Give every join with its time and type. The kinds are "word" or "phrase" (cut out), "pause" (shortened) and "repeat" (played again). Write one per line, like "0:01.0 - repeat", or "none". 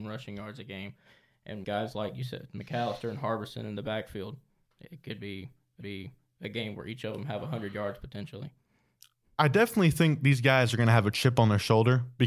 0:01.6 - word
0:05.8 - repeat